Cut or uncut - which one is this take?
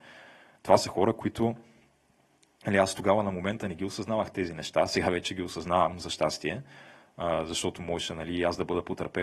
uncut